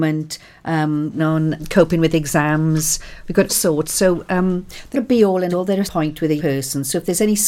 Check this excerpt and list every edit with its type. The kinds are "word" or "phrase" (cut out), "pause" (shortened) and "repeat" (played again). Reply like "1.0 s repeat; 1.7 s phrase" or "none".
1.2 s word; 1.6 s word; 3.5 s word; 4.9 s word; 5.5 s word; 5.8 s word; 6.4 s word